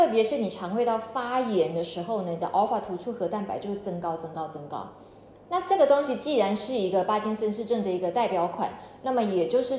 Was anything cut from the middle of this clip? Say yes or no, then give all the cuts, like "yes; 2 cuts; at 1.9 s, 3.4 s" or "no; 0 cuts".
no; 0 cuts